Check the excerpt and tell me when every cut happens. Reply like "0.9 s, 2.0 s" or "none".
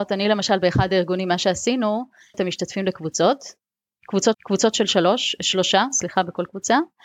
2.3 s, 4.3 s